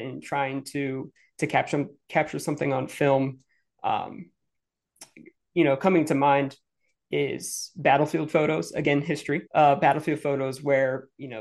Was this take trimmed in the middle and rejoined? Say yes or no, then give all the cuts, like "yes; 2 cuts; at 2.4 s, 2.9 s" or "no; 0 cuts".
yes; 1 cut; at 9.5 s